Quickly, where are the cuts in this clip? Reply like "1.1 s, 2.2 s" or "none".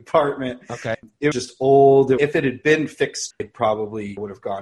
1.3 s, 3.3 s

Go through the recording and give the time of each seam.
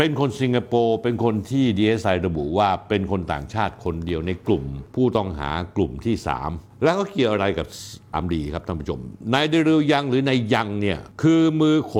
8.1 s

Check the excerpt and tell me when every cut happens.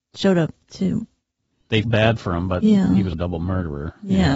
1.8 s, 3.1 s

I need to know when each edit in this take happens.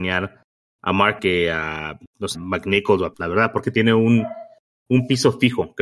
1.2 s, 2.3 s, 3.1 s, 3.6 s

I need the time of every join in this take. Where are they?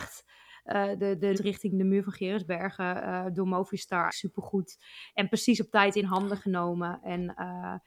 1.0 s, 1.3 s, 4.1 s

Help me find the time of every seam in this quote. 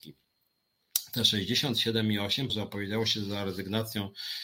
2.5 s

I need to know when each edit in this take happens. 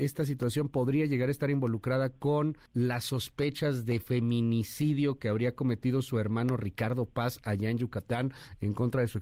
2.7 s

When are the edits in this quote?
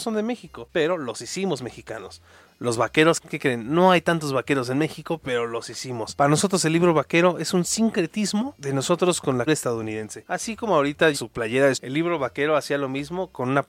9.5 s, 11.1 s, 11.7 s

